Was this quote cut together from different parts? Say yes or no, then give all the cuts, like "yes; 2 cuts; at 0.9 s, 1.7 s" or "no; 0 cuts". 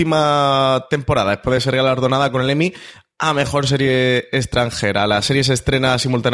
no; 0 cuts